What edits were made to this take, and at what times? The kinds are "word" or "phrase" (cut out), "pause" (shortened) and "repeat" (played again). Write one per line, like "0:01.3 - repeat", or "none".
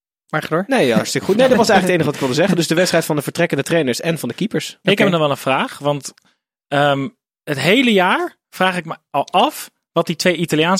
none